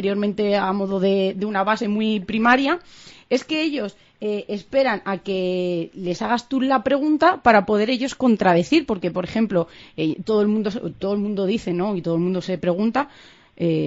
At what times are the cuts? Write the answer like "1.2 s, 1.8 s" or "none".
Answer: none